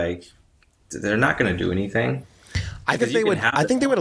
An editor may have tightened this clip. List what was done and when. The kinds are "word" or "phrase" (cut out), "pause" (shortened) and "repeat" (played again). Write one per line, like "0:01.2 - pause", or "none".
0:03.0 - word